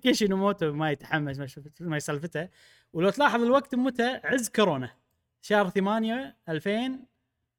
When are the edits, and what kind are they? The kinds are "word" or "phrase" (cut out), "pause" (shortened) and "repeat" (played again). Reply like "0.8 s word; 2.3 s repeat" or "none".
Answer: none